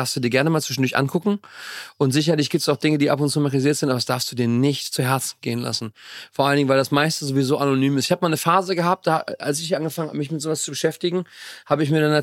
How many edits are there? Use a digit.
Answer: 0